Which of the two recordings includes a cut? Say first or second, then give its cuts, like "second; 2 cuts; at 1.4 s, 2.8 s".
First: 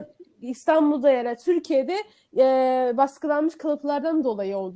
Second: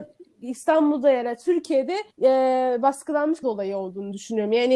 second; 2 cuts; at 2.1 s, 3.4 s